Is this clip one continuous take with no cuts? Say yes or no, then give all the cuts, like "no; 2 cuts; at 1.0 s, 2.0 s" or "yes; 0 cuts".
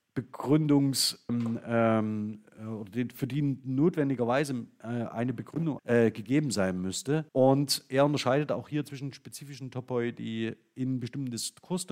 no; 3 cuts; at 1.3 s, 5.8 s, 7.3 s